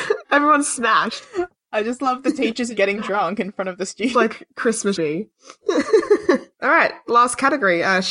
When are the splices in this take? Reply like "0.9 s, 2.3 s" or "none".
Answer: 2.7 s, 4.1 s, 4.9 s, 6.5 s